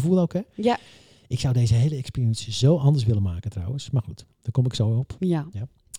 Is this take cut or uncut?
uncut